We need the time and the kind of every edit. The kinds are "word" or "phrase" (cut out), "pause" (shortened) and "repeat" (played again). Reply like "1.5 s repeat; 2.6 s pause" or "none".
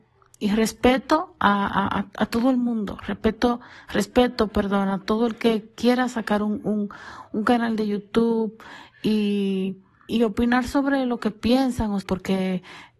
10.1 s word; 12.0 s word